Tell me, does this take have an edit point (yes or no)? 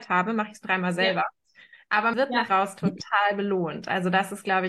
yes